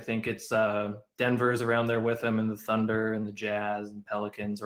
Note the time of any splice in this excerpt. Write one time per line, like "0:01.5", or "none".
none